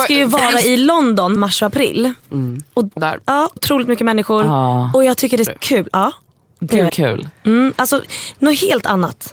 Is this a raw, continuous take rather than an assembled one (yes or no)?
no